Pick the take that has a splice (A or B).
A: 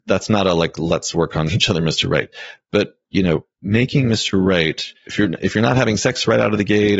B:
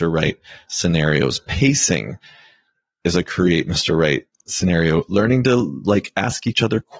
A